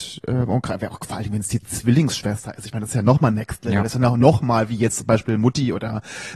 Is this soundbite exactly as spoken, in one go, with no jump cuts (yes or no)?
yes